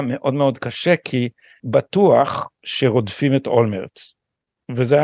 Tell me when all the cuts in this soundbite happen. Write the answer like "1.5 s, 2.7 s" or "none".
1.6 s